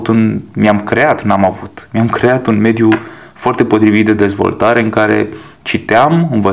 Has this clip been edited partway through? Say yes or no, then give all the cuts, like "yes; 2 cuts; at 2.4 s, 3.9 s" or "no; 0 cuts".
no; 0 cuts